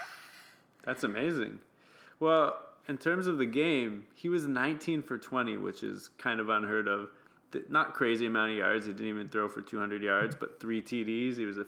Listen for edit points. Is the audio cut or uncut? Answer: uncut